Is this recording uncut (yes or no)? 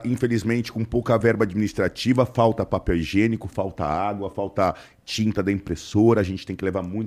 yes